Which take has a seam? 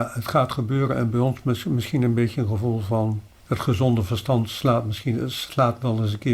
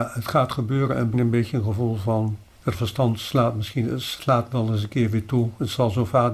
second; 2 cuts; at 1.1 s, 2.7 s

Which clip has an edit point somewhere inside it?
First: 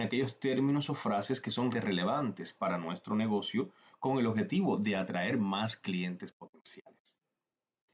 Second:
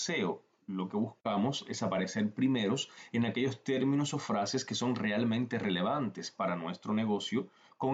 first; 1 cut; at 1.7 s

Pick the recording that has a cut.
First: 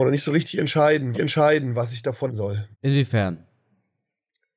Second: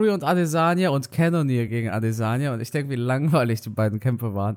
first; 3 cuts; at 1.1 s, 2.3 s, 2.7 s

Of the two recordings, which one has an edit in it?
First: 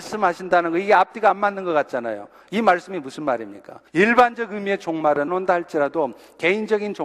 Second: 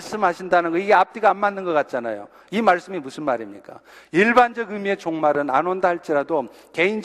first; 2 cuts; at 3.9 s, 5.3 s

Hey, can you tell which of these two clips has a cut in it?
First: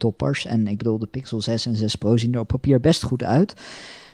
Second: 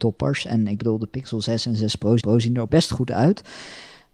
second; 2 cuts; at 2.2 s, 2.7 s

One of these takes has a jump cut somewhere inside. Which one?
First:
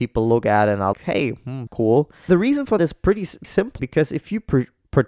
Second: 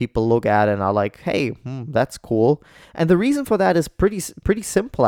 first; 6 cuts; at 0.9 s, 1.7 s, 2.3 s, 2.8 s, 3.4 s, 3.8 s

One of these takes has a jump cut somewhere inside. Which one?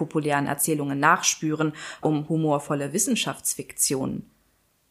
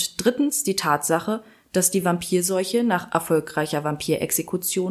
first; 1 cut; at 2.0 s

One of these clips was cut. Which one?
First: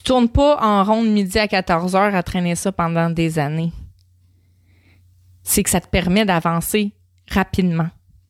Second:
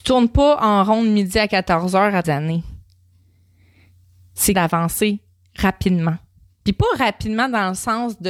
second; 2 cuts; at 2.2 s, 4.5 s

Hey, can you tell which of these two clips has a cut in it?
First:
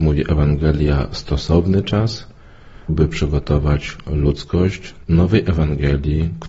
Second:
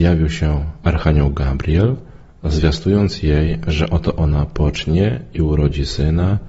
first; 2 cuts; at 2.9 s, 5.0 s

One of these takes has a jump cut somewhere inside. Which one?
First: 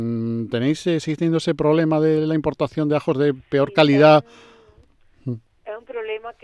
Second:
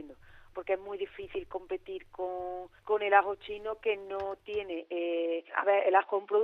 second; 2 cuts; at 2.8 s, 5.5 s

